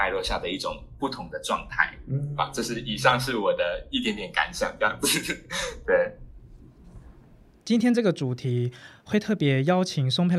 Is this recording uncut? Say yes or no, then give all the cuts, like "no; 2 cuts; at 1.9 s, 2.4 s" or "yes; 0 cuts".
yes; 0 cuts